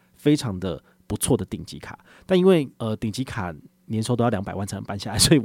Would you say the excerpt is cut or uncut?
cut